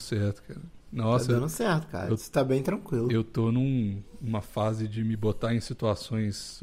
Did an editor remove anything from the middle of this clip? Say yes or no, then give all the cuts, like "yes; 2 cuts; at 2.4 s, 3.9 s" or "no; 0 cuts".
no; 0 cuts